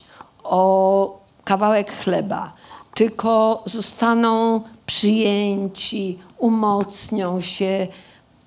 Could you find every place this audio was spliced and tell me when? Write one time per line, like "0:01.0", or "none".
none

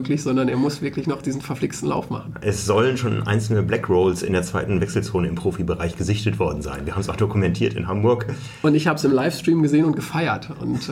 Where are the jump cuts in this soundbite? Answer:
none

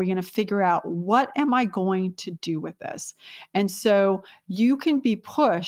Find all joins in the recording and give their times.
none

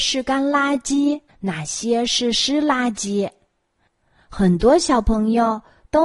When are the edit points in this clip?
0:01.3

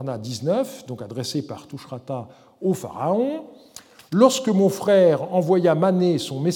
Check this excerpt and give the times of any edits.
none

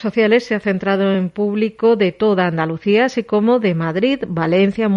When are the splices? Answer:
none

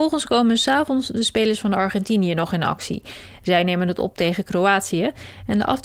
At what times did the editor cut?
none

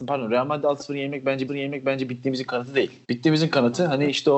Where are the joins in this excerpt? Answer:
0:01.5
0:03.0

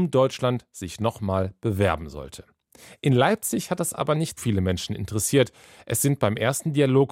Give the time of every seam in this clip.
0:04.4

